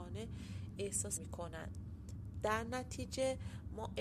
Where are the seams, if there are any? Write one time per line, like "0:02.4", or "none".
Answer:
0:01.2